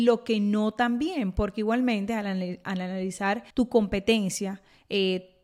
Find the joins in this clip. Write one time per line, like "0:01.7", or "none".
0:03.5